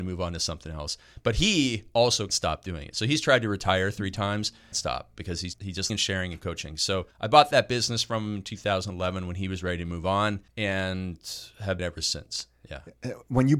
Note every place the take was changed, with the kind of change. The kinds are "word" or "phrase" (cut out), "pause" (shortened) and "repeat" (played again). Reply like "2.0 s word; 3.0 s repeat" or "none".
2.3 s word; 4.7 s phrase; 5.5 s word; 5.9 s phrase; 7.1 s pause; 10.5 s pause; 11.8 s phrase